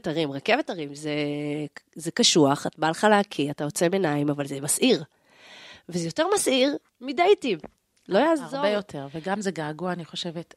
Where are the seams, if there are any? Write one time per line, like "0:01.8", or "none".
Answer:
none